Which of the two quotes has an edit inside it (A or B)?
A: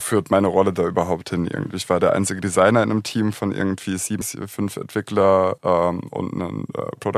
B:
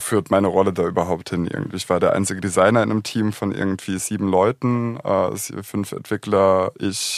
A